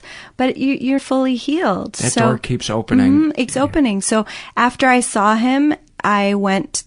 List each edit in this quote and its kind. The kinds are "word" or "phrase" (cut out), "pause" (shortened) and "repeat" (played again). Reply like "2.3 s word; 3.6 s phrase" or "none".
1.0 s word; 3.5 s word